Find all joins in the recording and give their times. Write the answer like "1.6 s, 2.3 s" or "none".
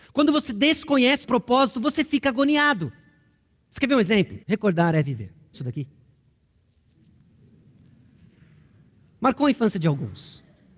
1.2 s, 4.4 s, 5.5 s